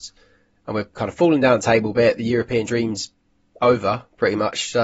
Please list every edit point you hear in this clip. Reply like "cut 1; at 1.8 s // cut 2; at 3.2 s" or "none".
none